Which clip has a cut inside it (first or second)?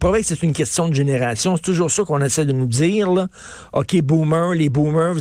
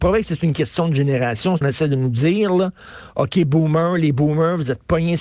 second